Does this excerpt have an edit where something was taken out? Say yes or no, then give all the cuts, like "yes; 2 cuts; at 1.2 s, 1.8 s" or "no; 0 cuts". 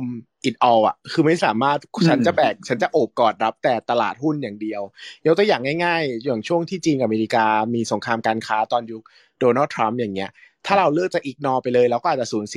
no; 0 cuts